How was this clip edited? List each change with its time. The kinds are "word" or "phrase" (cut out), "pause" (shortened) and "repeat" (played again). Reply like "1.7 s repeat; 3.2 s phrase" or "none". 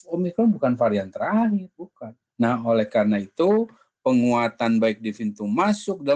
none